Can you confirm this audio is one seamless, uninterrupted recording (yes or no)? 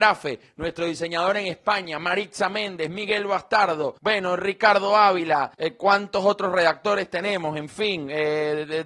no